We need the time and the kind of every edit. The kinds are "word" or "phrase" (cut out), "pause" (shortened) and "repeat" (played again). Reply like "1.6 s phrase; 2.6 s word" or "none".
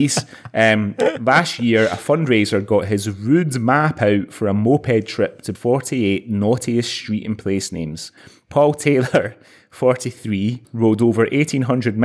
5.5 s word